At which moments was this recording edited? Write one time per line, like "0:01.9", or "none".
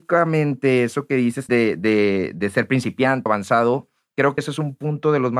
0:01.5
0:03.3
0:04.4